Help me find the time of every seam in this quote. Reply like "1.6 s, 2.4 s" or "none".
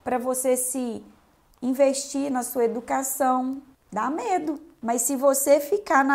none